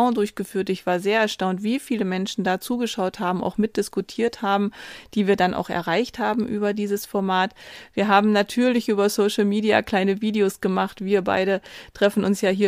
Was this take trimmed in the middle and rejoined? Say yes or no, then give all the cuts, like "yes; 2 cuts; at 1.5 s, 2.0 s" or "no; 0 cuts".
no; 0 cuts